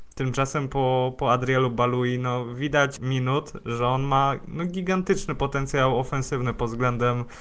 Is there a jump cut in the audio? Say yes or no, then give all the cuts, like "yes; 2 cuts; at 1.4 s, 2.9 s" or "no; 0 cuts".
yes; 1 cut; at 3.0 s